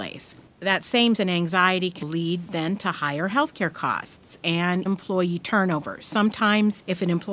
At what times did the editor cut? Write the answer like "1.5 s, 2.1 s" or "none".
1.2 s, 2.0 s, 4.9 s